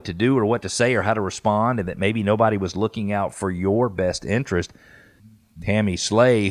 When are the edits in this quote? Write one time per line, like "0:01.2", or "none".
none